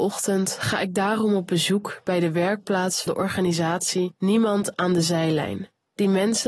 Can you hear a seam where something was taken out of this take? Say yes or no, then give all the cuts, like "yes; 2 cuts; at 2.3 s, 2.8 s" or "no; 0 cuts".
yes; 1 cut; at 3.1 s